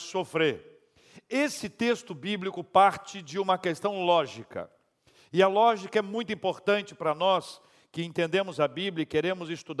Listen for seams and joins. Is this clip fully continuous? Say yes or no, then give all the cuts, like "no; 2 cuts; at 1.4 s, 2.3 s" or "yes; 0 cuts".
yes; 0 cuts